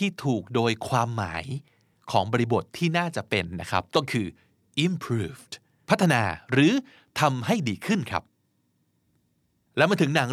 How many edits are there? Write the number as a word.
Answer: zero